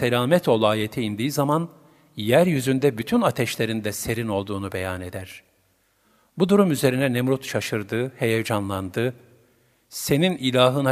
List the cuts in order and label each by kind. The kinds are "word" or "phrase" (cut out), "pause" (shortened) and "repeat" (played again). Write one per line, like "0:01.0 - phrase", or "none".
none

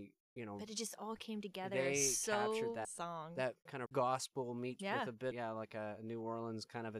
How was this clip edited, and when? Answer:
0:02.8 - phrase
0:03.9 - phrase
0:04.8 - word
0:05.3 - phrase

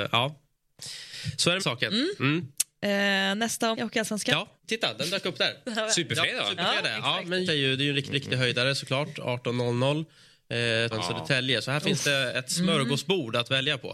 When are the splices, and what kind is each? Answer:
0:01.6 - phrase
0:03.7 - word
0:04.6 - pause
0:07.5 - word
0:08.1 - repeat
0:10.9 - phrase

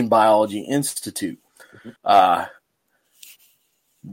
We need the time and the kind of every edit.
0:01.5 - pause
0:02.0 - pause

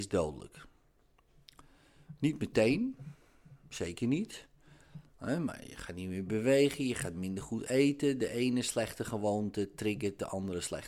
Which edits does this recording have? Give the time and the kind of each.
none

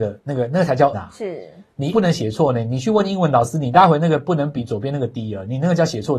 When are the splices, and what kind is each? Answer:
0:00.9 - word
0:01.9 - word

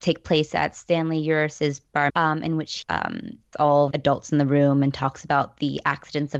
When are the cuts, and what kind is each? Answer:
0:02.1 - word
0:02.8 - word
0:03.5 - word
0:03.9 - word

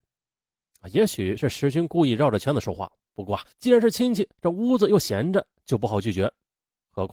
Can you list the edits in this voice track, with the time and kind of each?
0:03.5 - pause

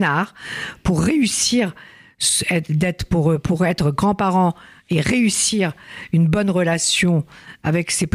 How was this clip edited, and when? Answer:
none

